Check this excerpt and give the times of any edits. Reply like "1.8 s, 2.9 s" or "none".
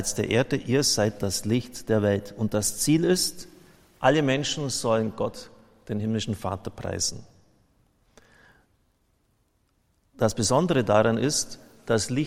none